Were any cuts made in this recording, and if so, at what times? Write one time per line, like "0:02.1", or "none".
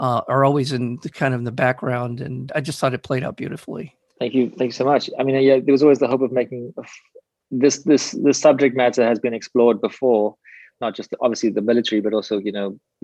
0:02.5